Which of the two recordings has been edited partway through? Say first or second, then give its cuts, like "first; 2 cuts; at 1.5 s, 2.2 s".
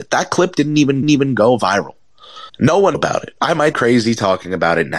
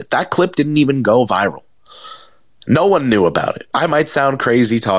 first; 4 cuts; at 1.0 s, 2.5 s, 2.9 s, 3.7 s